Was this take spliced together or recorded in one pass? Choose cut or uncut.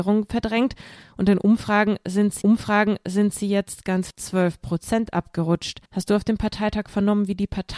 cut